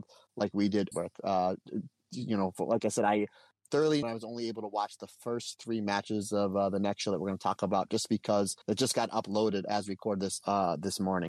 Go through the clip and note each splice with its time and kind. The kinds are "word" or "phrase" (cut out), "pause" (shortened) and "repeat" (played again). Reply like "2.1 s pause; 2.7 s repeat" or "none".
0.9 s phrase; 4.0 s phrase; 8.6 s pause